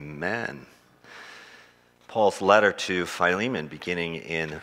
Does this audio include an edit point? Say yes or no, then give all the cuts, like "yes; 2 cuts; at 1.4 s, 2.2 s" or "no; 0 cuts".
no; 0 cuts